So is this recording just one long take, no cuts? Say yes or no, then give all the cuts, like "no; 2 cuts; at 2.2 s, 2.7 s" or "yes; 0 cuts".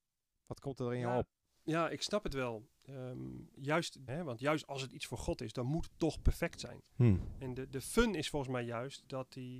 no; 1 cut; at 4.1 s